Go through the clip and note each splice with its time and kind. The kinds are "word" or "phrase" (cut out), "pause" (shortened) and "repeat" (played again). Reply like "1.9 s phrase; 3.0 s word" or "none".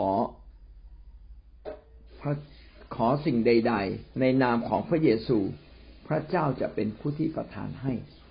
4.1 s word